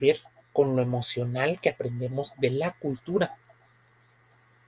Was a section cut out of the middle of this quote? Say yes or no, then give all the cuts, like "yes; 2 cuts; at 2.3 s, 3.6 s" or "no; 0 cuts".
no; 0 cuts